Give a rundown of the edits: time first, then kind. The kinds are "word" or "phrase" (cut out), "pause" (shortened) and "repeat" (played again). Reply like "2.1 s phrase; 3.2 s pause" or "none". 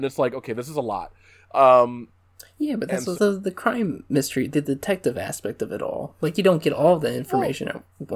3.1 s phrase; 4.5 s word